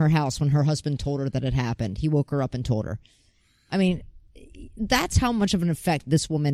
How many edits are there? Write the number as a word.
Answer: zero